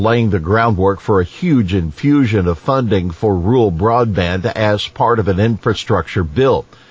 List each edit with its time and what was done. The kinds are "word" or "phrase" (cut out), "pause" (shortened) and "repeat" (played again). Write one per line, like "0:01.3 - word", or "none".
none